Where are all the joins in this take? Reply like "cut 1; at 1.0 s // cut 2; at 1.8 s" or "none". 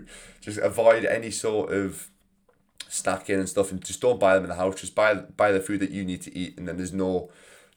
none